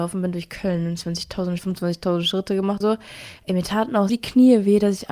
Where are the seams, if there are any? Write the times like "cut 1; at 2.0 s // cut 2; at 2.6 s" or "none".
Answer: cut 1; at 1.6 s // cut 2; at 2.8 s // cut 3; at 4.1 s

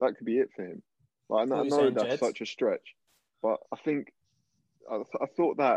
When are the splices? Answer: cut 1; at 3.6 s

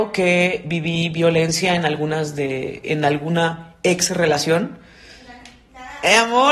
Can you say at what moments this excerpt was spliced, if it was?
none

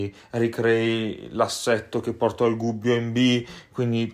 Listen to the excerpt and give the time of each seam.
none

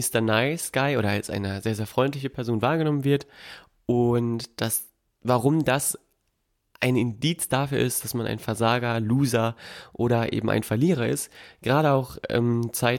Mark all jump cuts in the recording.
none

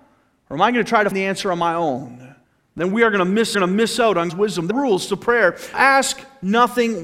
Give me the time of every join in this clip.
cut 1; at 1.1 s // cut 2; at 2.4 s // cut 3; at 3.5 s // cut 4; at 4.3 s // cut 5; at 4.7 s // cut 6; at 5.7 s

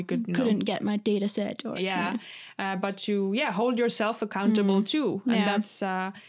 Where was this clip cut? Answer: cut 1; at 1.8 s

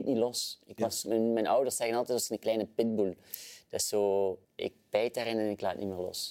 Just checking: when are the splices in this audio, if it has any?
cut 1; at 4.4 s

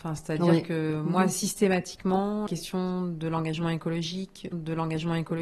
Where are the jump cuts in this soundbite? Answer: cut 1; at 2.5 s // cut 2; at 4.5 s

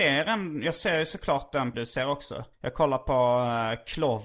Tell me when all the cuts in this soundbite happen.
cut 1; at 1.7 s // cut 2; at 2.5 s

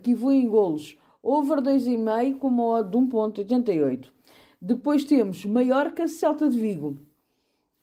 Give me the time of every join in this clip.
none

